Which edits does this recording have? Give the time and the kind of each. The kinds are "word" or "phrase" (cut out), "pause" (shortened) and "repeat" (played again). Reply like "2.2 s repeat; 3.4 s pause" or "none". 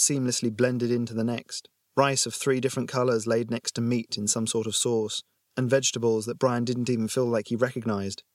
none